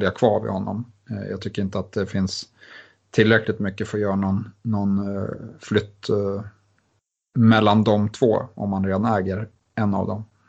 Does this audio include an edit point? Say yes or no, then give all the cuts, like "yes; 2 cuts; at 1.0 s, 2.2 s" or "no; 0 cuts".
no; 0 cuts